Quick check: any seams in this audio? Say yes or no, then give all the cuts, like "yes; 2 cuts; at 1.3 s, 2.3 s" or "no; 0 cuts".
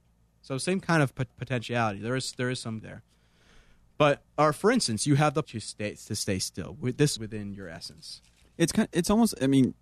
yes; 4 cuts; at 1.3 s, 2.8 s, 5.4 s, 7.2 s